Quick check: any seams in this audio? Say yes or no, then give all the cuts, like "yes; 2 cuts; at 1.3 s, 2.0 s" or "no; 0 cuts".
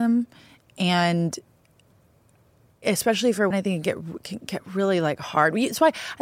yes; 2 cuts; at 2.8 s, 3.5 s